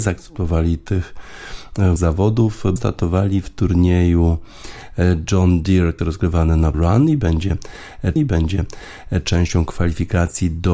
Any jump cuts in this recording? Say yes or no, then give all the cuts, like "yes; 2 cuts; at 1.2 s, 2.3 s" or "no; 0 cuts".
yes; 5 cuts; at 2.0 s, 2.8 s, 6.0 s, 6.7 s, 8.2 s